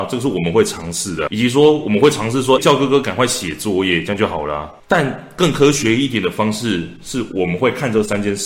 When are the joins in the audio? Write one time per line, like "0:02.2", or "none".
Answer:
0:01.3
0:02.6